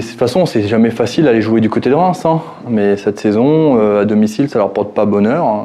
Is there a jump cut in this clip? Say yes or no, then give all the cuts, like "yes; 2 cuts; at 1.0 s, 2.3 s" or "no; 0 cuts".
no; 0 cuts